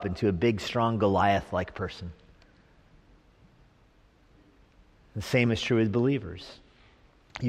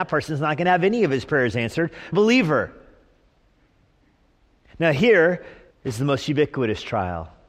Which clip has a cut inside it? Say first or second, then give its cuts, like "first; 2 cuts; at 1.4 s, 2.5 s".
second; 2 cuts; at 2.1 s, 5.7 s